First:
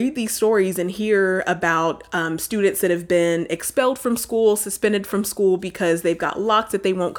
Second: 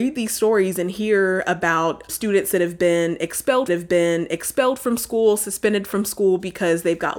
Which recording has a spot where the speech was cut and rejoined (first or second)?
second